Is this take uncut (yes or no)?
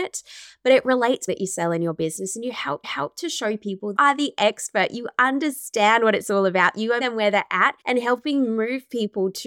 no